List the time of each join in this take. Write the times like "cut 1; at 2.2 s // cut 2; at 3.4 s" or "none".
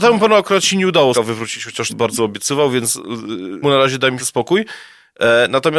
cut 1; at 1.1 s // cut 2; at 1.9 s // cut 3; at 3.6 s // cut 4; at 4.2 s

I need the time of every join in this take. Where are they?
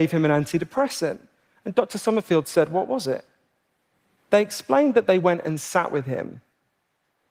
none

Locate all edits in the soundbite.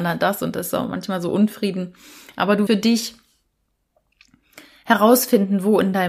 cut 1; at 2.7 s

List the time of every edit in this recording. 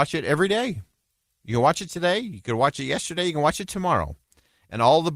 none

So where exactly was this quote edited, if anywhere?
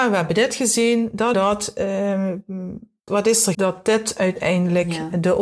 cut 1; at 1.3 s // cut 2; at 3.1 s // cut 3; at 3.5 s

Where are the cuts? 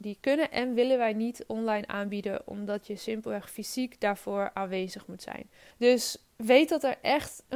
cut 1; at 5.7 s

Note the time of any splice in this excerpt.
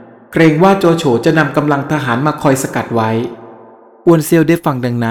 none

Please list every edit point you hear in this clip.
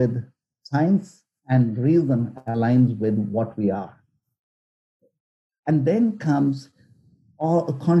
none

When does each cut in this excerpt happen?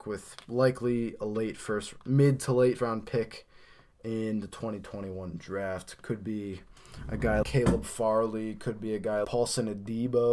cut 1; at 2.0 s // cut 2; at 2.8 s // cut 3; at 7.4 s // cut 4; at 9.2 s

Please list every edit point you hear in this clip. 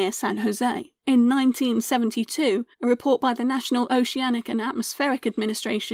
cut 1; at 1.0 s // cut 2; at 2.7 s

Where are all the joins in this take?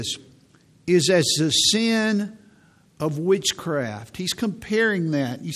none

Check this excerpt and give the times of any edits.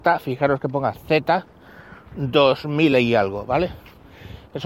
none

